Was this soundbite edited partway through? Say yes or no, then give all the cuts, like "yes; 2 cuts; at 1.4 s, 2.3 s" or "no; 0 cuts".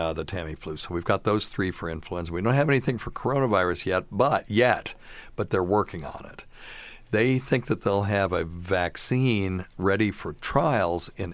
no; 0 cuts